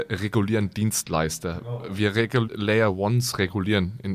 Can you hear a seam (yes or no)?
yes